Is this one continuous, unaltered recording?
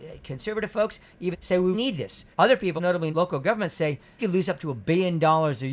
no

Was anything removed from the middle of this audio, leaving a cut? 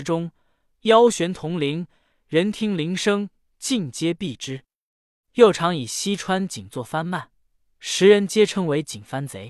no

